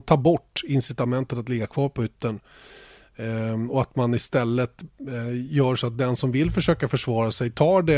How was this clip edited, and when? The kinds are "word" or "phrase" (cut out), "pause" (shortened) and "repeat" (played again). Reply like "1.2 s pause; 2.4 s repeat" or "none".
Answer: none